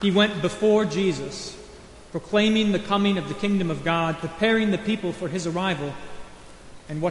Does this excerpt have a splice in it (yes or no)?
no